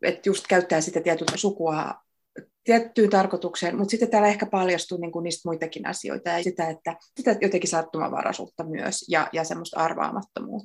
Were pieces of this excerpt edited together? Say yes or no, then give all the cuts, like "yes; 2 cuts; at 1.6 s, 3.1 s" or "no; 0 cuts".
yes; 4 cuts; at 1.3 s, 2.5 s, 6.4 s, 7.2 s